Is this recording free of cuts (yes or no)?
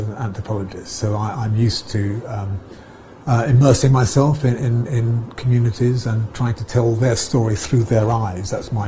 no